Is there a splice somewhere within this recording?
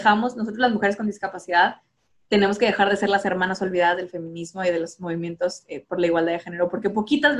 no; 0 cuts

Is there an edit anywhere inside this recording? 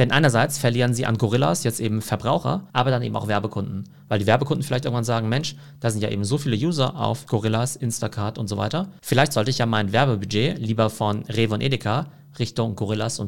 yes; 1 cut; at 2.7 s

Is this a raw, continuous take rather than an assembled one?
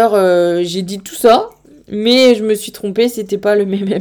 yes; 0 cuts

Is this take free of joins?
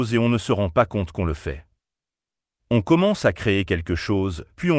yes; 0 cuts

